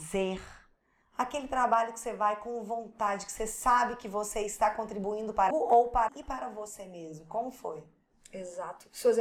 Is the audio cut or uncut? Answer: cut